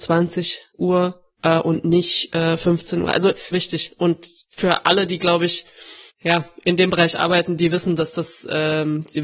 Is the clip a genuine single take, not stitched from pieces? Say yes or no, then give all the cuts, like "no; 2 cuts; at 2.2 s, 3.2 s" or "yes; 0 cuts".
no; 2 cuts; at 3.5 s, 6.1 s